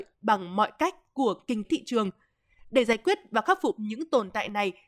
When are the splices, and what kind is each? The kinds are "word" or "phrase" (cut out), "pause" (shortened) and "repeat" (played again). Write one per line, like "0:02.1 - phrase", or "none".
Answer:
0:01.6 - word